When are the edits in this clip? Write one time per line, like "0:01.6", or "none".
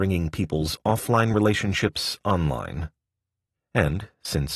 none